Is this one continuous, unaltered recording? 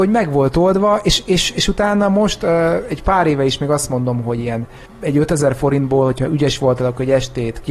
no; 1 cut; at 4.9 s

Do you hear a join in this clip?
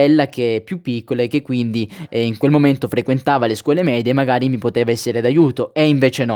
no; 0 cuts

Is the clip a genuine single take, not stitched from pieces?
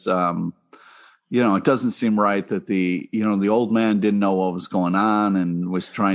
yes; 0 cuts

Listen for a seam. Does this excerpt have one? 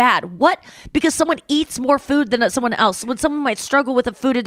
no; 0 cuts

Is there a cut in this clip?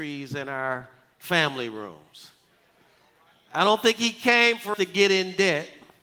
yes; 1 cut; at 4.7 s

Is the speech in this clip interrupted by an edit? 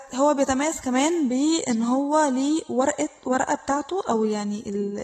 no; 0 cuts

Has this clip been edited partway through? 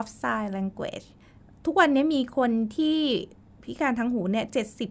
no; 0 cuts

